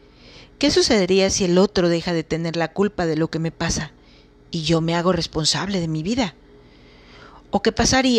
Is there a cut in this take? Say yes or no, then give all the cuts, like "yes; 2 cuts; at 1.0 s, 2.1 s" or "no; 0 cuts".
no; 0 cuts